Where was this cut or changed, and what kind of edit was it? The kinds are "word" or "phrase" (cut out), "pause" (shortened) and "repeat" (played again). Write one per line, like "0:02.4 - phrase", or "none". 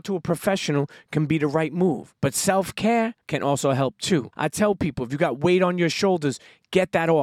0:02.2 - pause
0:03.2 - pause
0:04.3 - pause

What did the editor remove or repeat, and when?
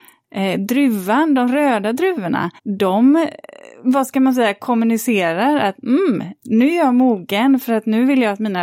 0:02.6 - pause

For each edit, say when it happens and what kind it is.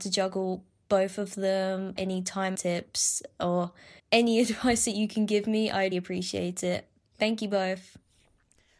0:02.0 - word
0:02.5 - word
0:04.0 - pause
0:05.9 - word

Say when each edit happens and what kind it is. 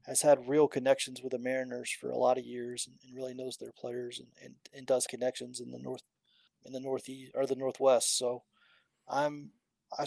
0:05.1 - word

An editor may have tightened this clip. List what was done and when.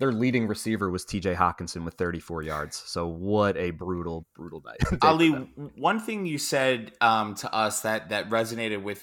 0:04.2 - word

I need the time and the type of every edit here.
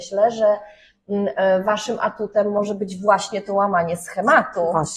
none

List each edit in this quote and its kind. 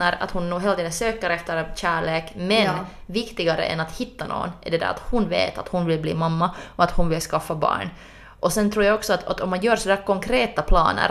none

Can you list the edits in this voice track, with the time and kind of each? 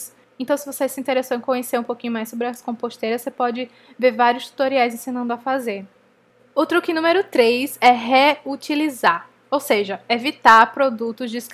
none

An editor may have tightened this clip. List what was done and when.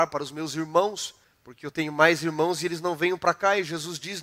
0:01.2 - pause

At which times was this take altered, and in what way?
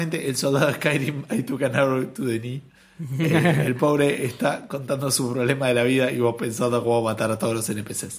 none

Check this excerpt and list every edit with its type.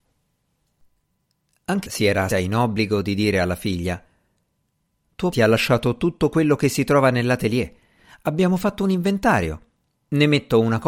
0:01.9 - word
0:02.3 - word
0:05.3 - word

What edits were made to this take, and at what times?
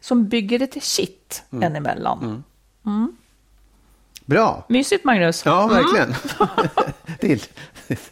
0:07.2 - word

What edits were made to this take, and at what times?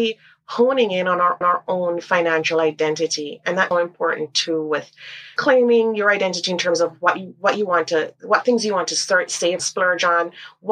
0:01.4 - repeat
0:03.7 - word
0:05.4 - word
0:09.6 - phrase

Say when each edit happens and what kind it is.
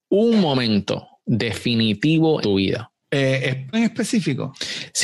0:02.4 - word
0:03.0 - pause
0:03.7 - word

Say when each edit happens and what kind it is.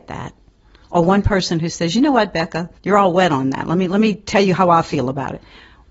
0:02.8 - pause

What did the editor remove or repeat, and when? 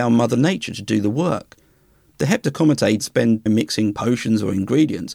0:03.0 - word
0:03.5 - word

